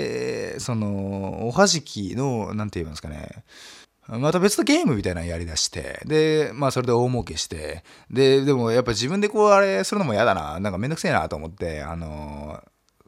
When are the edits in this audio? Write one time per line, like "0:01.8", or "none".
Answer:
0:03.8